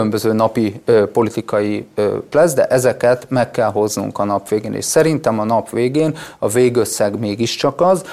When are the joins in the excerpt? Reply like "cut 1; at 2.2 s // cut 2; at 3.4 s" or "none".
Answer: cut 1; at 2.3 s